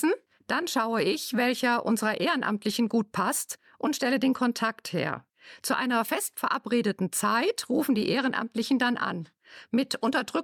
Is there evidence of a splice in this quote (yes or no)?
no